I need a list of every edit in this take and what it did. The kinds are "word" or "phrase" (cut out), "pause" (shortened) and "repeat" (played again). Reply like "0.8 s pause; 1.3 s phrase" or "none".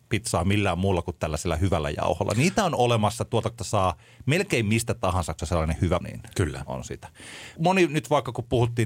3.6 s word; 5.4 s phrase; 6.0 s word